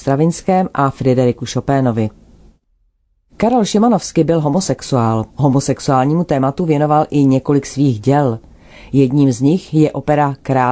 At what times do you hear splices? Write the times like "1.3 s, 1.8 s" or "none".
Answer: 5.3 s